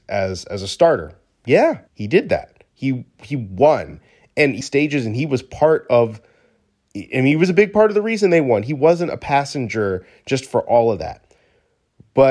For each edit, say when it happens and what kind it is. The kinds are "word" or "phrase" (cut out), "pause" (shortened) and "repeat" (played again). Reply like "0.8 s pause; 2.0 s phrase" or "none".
1.9 s pause; 2.7 s pause; 4.6 s phrase